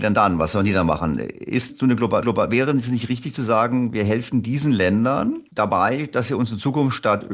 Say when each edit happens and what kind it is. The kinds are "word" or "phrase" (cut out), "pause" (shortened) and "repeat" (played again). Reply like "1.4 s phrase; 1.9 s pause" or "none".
1.7 s word; 2.2 s repeat; 5.5 s pause